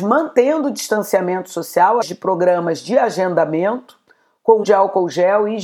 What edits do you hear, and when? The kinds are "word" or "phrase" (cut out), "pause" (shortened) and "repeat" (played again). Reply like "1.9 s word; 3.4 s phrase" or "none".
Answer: 2.0 s word; 4.6 s word

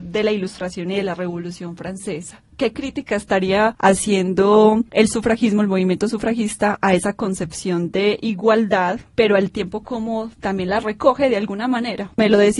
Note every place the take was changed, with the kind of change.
none

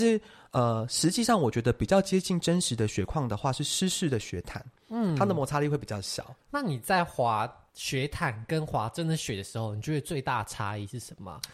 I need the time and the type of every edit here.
6.4 s pause; 7.7 s pause

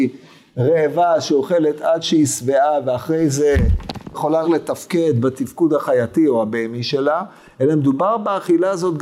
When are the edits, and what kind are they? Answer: 4.1 s word; 4.4 s word

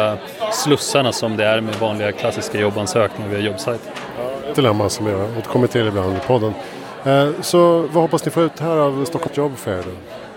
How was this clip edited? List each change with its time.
4.5 s word; 9.3 s word

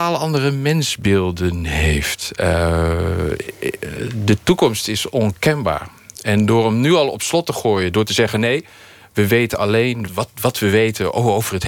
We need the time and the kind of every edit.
10.1 s word

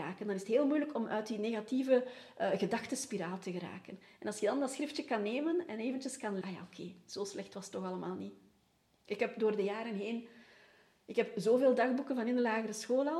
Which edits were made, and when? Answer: 6.4 s phrase

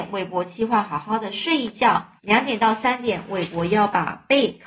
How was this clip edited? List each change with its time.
2.2 s pause

